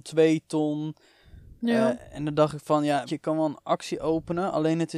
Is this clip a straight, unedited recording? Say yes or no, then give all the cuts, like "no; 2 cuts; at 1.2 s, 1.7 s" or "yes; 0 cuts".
no; 1 cut; at 3.1 s